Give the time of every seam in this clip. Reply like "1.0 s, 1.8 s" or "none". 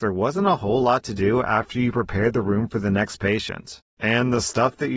none